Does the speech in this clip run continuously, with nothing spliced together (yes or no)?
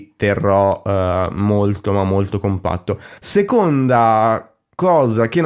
no